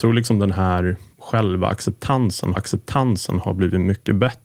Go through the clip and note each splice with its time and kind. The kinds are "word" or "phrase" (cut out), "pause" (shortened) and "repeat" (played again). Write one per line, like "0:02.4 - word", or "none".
0:01.1 - pause
0:02.5 - repeat